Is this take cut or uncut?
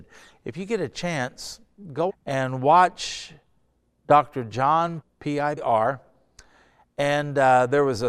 cut